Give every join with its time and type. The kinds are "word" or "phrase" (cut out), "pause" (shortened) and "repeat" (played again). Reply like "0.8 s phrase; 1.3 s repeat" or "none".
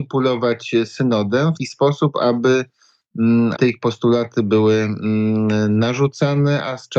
1.6 s word; 3.5 s word